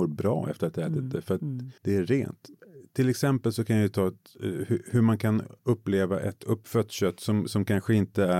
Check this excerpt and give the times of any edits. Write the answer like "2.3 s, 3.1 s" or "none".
1.8 s, 5.6 s